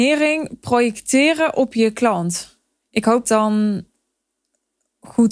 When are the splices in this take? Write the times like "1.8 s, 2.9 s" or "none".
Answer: 2.8 s, 3.2 s

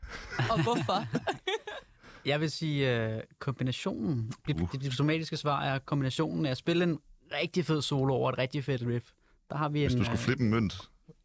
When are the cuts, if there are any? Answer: none

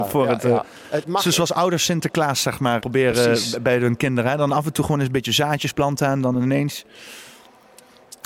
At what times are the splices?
1.0 s, 2.8 s

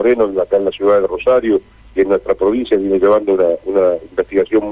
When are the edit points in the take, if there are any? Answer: none

